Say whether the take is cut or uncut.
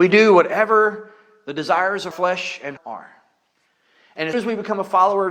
cut